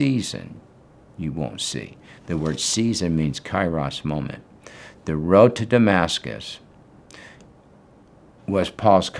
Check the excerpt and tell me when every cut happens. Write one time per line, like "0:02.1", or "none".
none

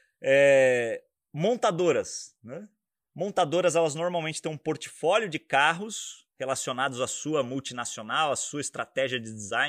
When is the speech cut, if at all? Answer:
0:06.3

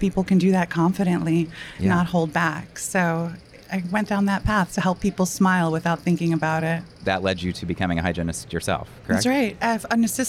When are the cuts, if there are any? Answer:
none

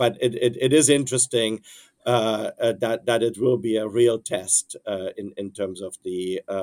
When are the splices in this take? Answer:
none

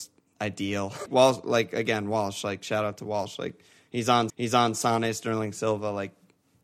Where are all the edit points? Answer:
0:01.1
0:04.3

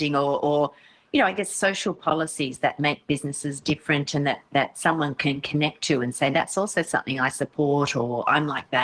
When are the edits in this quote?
none

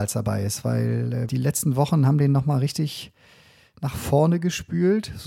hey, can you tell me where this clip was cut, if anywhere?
0:01.3

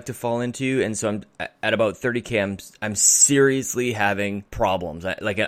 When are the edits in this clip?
0:04.5

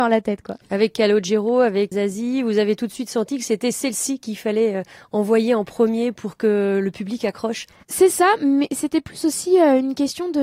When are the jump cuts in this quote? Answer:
0:01.9

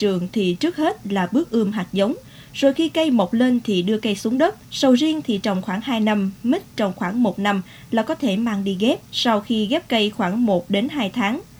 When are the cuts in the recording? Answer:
0:04.6
0:09.1

